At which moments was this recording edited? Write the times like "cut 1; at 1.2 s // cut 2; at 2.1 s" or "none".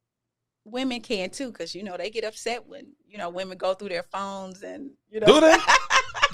cut 1; at 1.0 s // cut 2; at 5.0 s